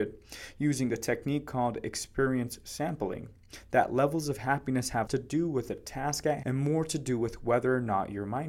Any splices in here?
yes; 2 cuts; at 5.1 s, 6.4 s

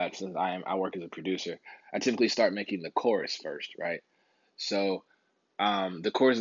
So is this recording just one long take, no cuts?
yes; 0 cuts

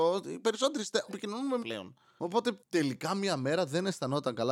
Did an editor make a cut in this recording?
yes; 3 cuts; at 1.1 s, 1.6 s, 2.7 s

